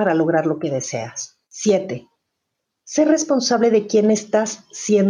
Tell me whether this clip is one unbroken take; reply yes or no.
no